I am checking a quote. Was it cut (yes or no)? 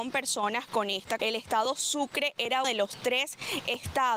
yes